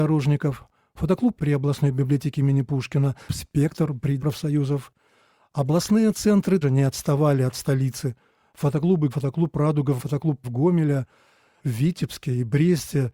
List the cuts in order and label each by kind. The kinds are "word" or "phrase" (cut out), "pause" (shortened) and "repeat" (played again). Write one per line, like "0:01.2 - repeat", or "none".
0:01.4 - word
0:03.3 - word
0:04.2 - word
0:06.6 - word
0:09.1 - word
0:10.0 - word
0:10.4 - word
0:11.6 - word